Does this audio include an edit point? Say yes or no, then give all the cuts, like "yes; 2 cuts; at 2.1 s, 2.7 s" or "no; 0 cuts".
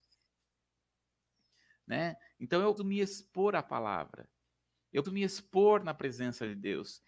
yes; 2 cuts; at 2.8 s, 5.0 s